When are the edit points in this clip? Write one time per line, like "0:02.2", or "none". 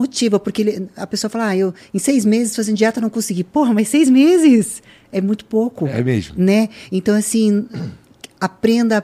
none